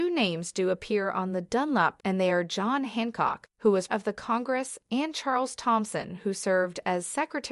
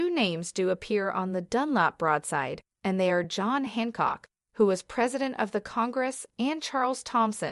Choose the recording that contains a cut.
first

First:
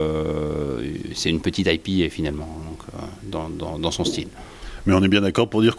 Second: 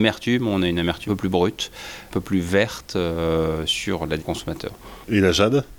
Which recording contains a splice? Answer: second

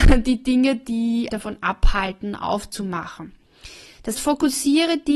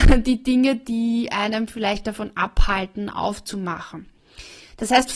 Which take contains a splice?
first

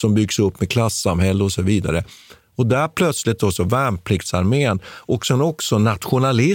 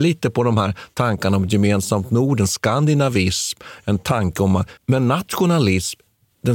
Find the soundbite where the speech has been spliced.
second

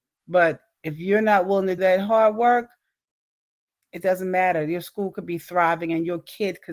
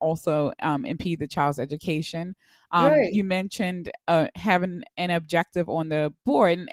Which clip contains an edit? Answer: first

